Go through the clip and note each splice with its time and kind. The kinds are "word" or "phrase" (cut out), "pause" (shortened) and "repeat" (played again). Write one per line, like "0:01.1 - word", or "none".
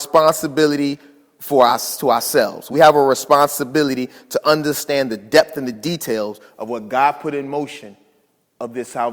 none

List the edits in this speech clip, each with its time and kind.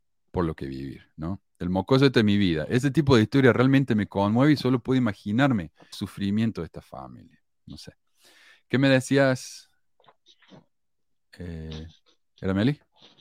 0:05.9 - word

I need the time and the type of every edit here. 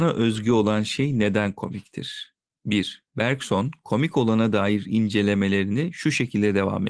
0:03.1 - pause

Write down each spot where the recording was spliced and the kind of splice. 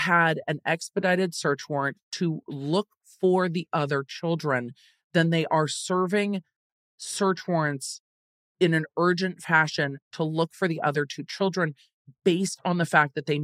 none

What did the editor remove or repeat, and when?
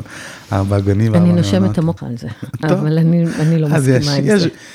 0:02.0 - phrase

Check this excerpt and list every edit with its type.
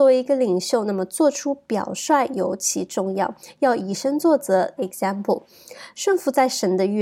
0:04.8 - phrase

